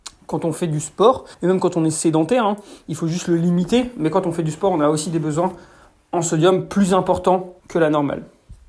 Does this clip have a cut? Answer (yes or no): yes